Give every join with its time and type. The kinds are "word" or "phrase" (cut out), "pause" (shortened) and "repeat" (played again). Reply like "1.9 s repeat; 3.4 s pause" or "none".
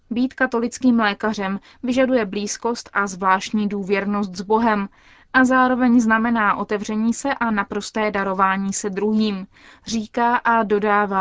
none